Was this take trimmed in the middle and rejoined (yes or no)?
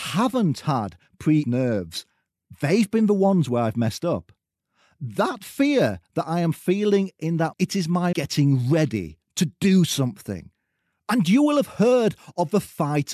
yes